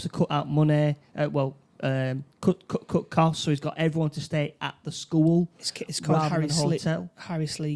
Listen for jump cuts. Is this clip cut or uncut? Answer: uncut